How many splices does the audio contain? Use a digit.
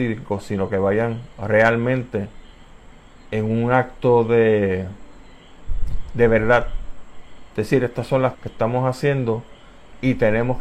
1